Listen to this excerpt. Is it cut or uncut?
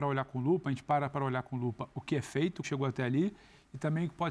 cut